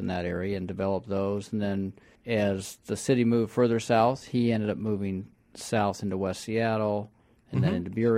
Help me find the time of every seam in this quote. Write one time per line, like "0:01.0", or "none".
0:02.2